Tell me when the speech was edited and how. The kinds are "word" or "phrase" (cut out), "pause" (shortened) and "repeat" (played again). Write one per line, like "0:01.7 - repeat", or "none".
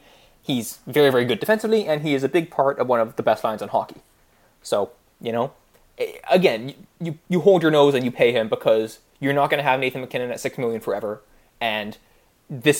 none